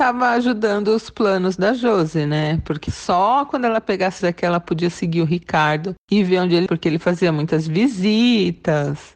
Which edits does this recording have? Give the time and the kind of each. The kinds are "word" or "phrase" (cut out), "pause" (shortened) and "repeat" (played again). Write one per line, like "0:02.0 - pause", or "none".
0:04.2 - word
0:06.7 - word